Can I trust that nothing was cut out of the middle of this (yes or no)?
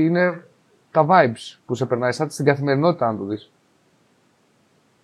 yes